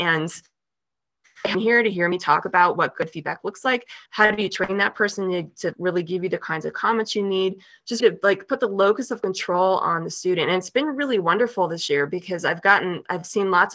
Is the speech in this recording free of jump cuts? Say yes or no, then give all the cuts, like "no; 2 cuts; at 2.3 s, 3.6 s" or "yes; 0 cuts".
no; 3 cuts; at 4.1 s, 5.7 s, 8.0 s